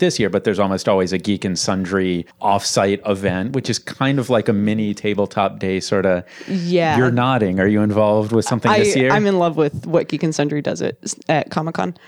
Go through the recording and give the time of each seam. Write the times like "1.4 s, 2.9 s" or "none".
2.3 s